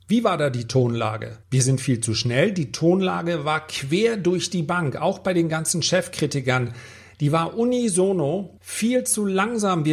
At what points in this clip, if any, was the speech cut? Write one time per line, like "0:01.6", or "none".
0:01.4
0:08.6